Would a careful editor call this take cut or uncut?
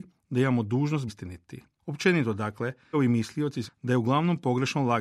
cut